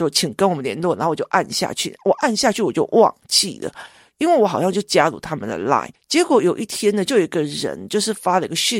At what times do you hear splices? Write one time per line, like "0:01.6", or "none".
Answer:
none